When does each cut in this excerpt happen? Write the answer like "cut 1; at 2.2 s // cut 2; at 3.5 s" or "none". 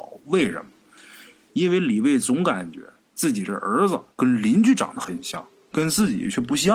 cut 1; at 4.1 s